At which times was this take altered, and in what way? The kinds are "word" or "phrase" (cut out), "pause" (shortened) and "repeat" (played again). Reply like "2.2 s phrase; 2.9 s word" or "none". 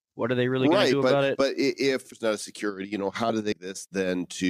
2.1 s word; 3.5 s word